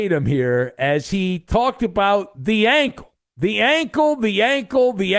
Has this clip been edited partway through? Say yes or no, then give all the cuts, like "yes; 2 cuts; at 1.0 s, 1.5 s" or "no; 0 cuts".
no; 0 cuts